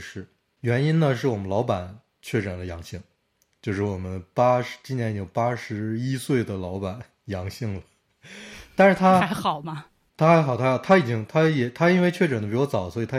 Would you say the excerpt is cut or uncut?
uncut